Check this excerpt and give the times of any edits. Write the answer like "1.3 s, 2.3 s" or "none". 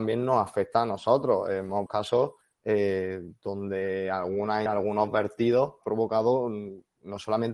1.9 s, 2.4 s, 4.7 s, 5.8 s